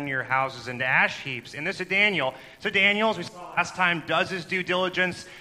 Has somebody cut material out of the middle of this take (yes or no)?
yes